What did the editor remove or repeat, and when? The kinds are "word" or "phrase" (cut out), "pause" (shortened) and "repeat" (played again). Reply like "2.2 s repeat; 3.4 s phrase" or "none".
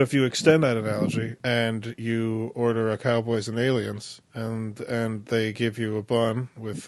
4.2 s pause